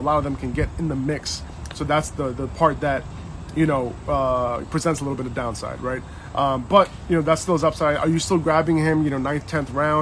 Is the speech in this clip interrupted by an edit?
no; 0 cuts

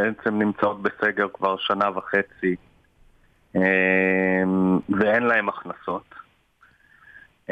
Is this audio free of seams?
yes; 0 cuts

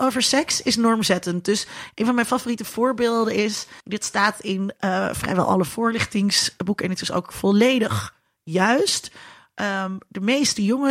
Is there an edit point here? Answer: yes; 1 cut; at 3.8 s

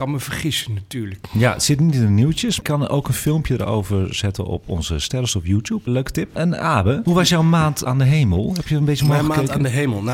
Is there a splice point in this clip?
no; 0 cuts

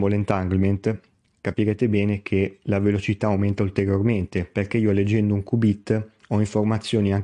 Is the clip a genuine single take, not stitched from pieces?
yes; 0 cuts

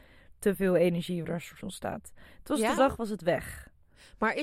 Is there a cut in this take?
yes; 3 cuts; at 1.2 s, 1.6 s, 2.8 s

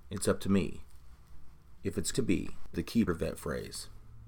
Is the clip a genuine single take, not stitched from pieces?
no; 3 cuts; at 2.1 s, 2.7 s, 3.1 s

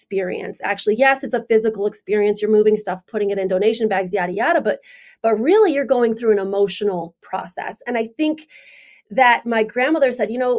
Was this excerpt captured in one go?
yes; 0 cuts

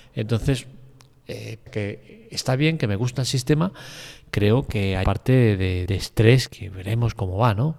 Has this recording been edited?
yes; 4 cuts; at 1.7 s, 5.0 s, 5.9 s, 6.5 s

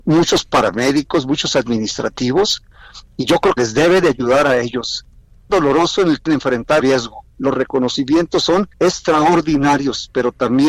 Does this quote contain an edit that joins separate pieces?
yes; 6 cuts; at 3.6 s, 5.5 s, 6.3 s, 6.8 s, 7.3 s, 8.7 s

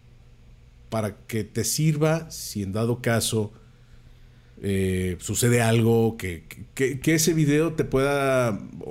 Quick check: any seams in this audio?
no; 0 cuts

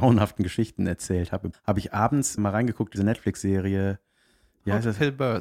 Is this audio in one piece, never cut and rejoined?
no; 3 cuts; at 1.5 s, 2.4 s, 3.0 s

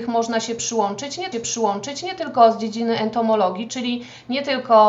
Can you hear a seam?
yes; 2 cuts; at 1.3 s, 3.7 s

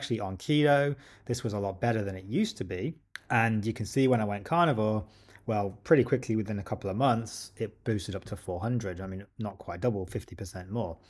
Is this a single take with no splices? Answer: yes; 0 cuts

